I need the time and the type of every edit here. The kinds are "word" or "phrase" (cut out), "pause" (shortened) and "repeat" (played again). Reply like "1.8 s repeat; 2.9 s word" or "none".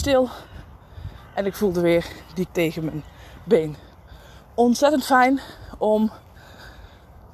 2.5 s word